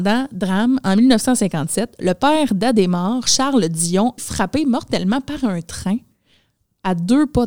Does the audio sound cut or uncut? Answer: cut